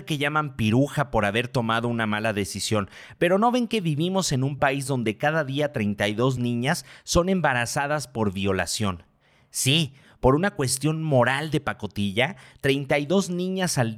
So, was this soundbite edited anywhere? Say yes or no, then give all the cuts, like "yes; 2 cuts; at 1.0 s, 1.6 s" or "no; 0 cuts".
no; 0 cuts